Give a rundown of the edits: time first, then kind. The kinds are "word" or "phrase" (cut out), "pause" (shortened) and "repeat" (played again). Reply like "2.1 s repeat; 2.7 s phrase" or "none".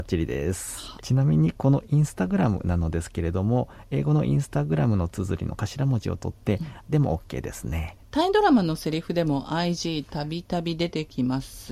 6.9 s word